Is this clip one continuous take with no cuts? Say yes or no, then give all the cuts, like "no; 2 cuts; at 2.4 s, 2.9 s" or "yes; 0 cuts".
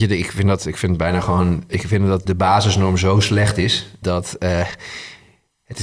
no; 2 cuts; at 2.3 s, 4.0 s